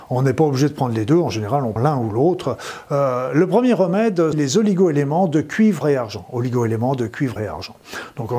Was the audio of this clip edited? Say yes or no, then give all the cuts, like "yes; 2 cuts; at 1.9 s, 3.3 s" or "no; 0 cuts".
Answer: yes; 4 cuts; at 1.8 s, 4.3 s, 5.8 s, 7.4 s